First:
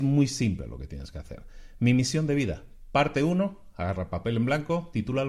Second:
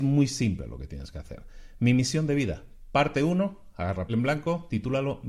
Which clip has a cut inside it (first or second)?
second